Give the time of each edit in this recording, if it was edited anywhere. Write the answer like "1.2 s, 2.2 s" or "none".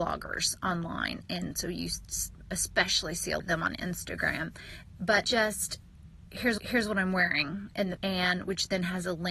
3.4 s, 5.2 s, 6.6 s, 8.0 s